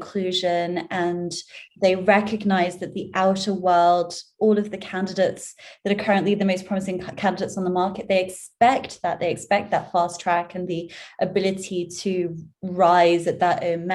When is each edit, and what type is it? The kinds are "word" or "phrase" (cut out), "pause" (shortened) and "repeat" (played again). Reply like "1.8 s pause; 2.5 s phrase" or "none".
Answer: none